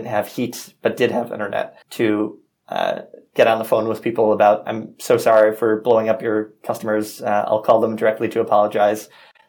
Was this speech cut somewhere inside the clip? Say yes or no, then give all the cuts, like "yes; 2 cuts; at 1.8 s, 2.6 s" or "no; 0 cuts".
yes; 1 cut; at 1.8 s